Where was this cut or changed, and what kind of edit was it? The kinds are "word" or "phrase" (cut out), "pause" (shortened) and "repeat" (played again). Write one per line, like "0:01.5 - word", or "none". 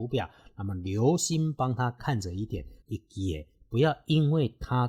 0:02.8 - pause